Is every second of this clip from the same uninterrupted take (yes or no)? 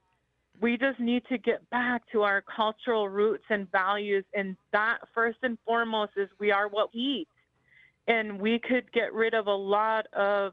no